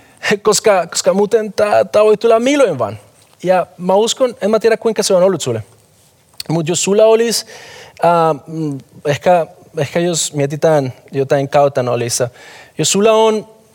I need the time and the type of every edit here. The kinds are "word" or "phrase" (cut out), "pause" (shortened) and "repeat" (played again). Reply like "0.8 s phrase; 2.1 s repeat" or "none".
none